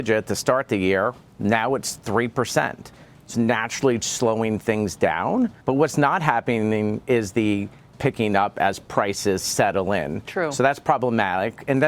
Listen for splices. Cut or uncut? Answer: cut